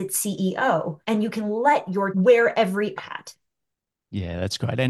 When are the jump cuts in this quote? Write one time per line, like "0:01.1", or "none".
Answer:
0:01.0
0:02.1
0:03.0